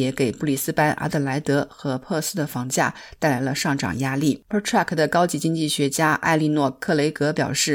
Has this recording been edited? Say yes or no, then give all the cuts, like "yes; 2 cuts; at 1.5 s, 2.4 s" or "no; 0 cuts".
yes; 1 cut; at 4.5 s